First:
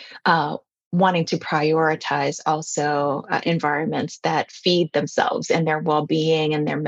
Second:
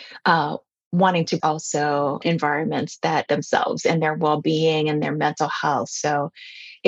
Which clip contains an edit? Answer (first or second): second